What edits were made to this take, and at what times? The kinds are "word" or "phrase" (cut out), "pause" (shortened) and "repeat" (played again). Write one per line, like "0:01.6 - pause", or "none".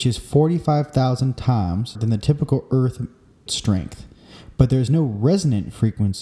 0:01.9 - word
0:03.5 - word

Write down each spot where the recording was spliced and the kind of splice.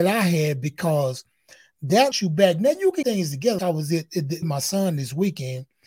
0:02.1 - phrase
0:03.0 - word
0:03.6 - word
0:04.4 - word

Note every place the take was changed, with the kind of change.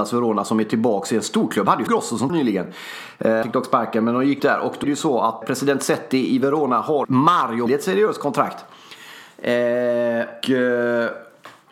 0:01.9 - word
0:02.3 - word
0:03.4 - word
0:04.4 - word
0:04.8 - word
0:05.4 - word
0:07.0 - word
0:07.7 - word
0:10.4 - word

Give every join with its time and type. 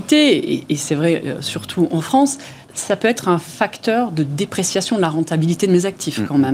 0:02.6 - pause

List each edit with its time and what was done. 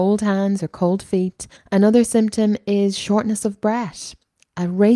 0:01.6 - pause

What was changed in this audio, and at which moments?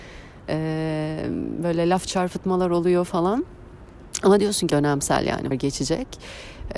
0:04.7 - word
0:05.5 - word

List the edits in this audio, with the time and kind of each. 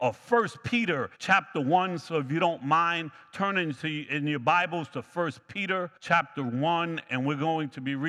0:01.1 - pause
0:06.0 - pause

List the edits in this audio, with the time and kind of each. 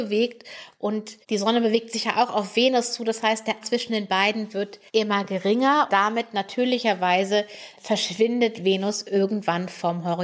0:01.2 - pause
0:03.6 - word
0:04.9 - pause
0:05.9 - word
0:07.8 - word

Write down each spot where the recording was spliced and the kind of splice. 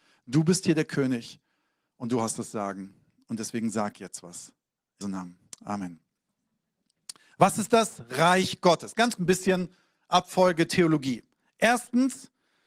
0:05.0 - word
0:09.2 - word

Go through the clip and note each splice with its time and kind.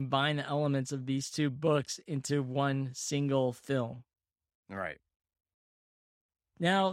none

